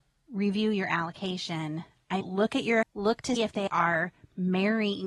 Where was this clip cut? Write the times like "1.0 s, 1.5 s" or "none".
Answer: 2.2 s, 2.8 s, 3.4 s, 3.7 s